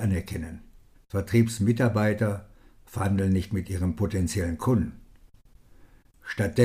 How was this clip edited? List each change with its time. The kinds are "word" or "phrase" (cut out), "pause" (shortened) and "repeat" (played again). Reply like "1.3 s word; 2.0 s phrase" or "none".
0.9 s pause